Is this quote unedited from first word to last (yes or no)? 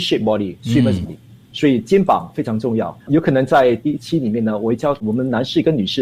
no